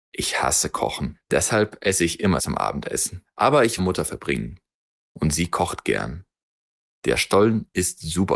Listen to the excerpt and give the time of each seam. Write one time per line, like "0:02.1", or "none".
0:02.4
0:03.8